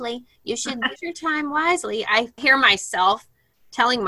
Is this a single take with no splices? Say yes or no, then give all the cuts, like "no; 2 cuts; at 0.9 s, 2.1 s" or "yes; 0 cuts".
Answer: no; 2 cuts; at 1.0 s, 2.4 s